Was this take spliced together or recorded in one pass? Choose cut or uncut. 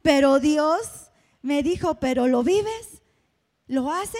uncut